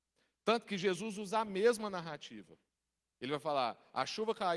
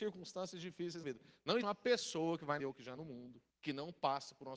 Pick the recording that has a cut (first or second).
second